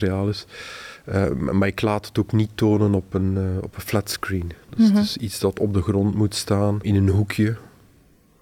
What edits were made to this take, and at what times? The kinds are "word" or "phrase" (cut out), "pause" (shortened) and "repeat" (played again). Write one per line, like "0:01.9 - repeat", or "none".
0:06.8 - word